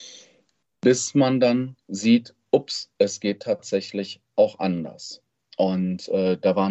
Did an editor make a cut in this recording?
yes; 2 cuts; at 1.8 s, 2.9 s

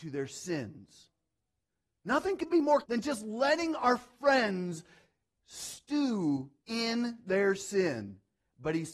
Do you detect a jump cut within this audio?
yes; 2 cuts; at 2.8 s, 6.6 s

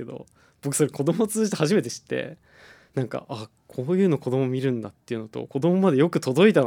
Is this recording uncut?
yes; 0 cuts

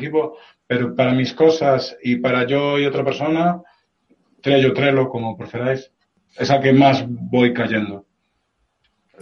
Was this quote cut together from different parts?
no; 0 cuts

